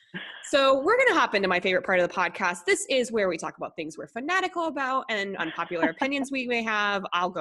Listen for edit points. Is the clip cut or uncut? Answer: uncut